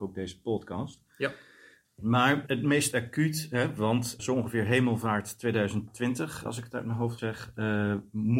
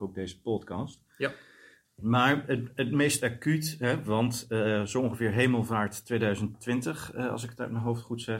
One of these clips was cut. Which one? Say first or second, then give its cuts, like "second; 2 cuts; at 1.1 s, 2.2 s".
first; 4 cuts; at 2.5 s, 4.2 s, 6.5 s, 7.2 s